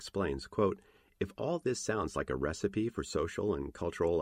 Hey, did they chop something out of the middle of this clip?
no; 0 cuts

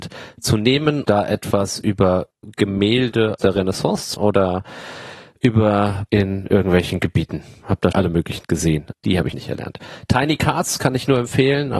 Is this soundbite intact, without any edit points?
no; 8 cuts; at 1.0 s, 3.4 s, 4.1 s, 6.1 s, 7.9 s, 8.5 s, 8.9 s, 9.3 s

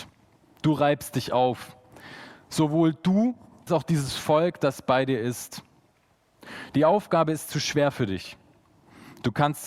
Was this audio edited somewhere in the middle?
yes; 1 cut; at 3.7 s

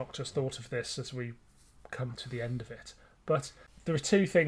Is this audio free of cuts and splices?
yes; 0 cuts

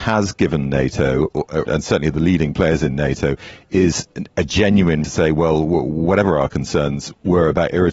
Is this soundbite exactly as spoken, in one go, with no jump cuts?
no; 2 cuts; at 1.7 s, 5.0 s

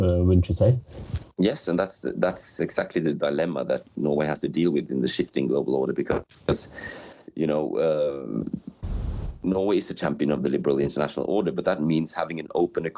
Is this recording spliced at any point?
no; 0 cuts

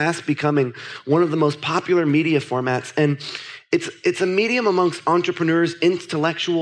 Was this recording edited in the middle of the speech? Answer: no; 0 cuts

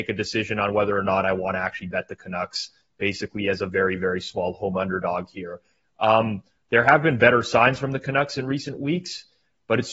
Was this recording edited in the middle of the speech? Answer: no; 0 cuts

